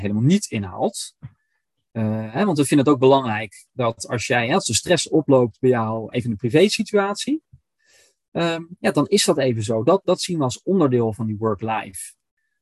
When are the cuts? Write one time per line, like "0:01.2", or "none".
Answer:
0:06.1